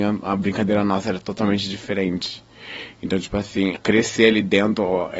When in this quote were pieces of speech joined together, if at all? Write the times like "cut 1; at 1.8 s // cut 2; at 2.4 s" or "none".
cut 1; at 3.8 s